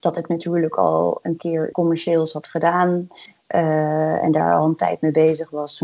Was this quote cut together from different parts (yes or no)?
yes